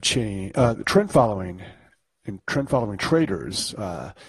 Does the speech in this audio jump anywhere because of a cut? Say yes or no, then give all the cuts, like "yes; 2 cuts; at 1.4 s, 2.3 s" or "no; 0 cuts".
no; 0 cuts